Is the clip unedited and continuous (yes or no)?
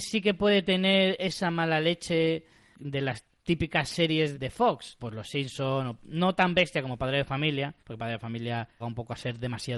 no